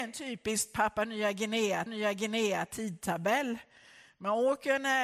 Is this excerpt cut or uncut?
cut